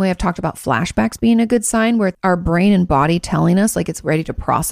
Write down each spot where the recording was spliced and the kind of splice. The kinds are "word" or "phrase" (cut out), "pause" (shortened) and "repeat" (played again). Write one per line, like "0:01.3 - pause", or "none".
0:02.1 - word